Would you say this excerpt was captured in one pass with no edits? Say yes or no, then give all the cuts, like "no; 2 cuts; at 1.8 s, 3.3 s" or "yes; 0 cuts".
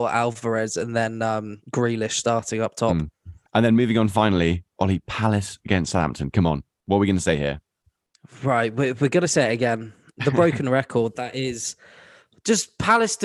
yes; 0 cuts